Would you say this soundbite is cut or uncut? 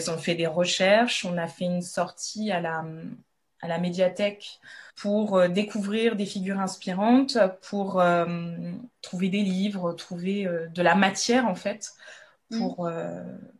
cut